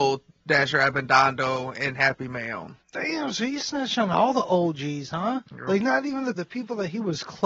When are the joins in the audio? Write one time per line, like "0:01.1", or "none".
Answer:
0:02.8
0:05.5
0:06.4